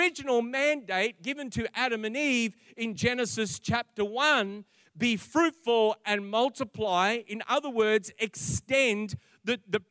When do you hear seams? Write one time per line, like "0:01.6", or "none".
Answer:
none